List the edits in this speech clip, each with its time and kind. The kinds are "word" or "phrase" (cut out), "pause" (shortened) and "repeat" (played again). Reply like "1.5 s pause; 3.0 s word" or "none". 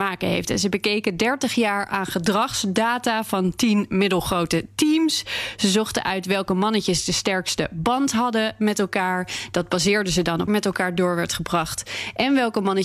10.5 s phrase